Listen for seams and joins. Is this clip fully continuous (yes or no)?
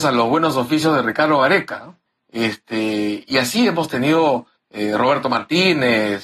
no